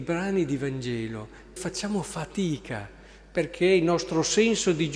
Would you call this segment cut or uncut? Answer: cut